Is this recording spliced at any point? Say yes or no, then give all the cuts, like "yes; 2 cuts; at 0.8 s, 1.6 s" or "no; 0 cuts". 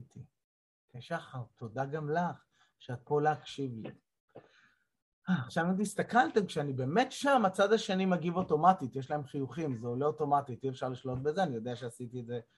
no; 0 cuts